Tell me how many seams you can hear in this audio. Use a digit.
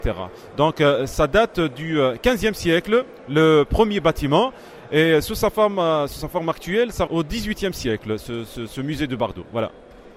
2